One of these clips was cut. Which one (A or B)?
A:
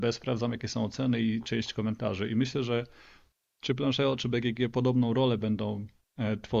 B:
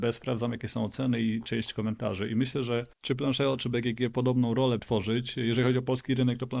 B